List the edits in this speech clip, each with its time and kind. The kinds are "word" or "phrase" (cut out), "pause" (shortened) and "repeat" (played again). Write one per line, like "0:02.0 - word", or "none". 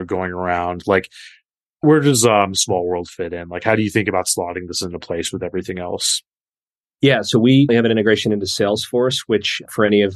0:07.7 - word